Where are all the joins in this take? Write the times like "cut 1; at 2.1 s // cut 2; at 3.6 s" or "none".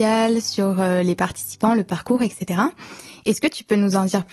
none